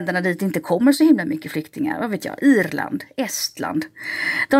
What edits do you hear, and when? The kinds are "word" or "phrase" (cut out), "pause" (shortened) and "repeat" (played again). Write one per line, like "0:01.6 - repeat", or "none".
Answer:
none